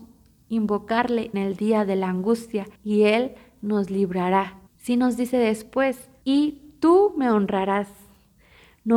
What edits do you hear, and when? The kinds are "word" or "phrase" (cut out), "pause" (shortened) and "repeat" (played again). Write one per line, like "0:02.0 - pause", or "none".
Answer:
0:01.3 - word
0:02.8 - pause
0:04.7 - pause